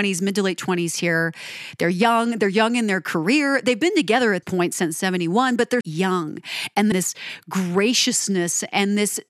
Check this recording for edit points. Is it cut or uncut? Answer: cut